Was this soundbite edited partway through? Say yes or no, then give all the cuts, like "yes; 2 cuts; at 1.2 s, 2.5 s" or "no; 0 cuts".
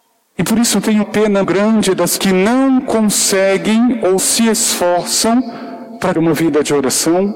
yes; 5 cuts; at 1.0 s, 1.4 s, 2.2 s, 4.2 s, 6.1 s